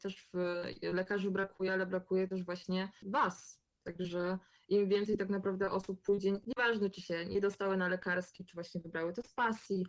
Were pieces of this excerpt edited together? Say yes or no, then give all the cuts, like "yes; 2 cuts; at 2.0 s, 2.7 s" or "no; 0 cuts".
no; 0 cuts